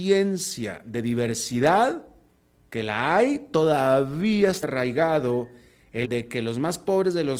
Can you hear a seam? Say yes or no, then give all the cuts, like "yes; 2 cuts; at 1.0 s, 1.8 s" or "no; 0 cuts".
yes; 2 cuts; at 4.6 s, 6.0 s